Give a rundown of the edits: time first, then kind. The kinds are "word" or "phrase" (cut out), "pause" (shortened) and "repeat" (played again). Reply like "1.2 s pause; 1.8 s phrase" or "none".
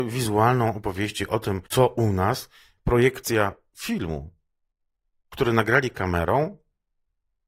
1.7 s pause; 2.8 s word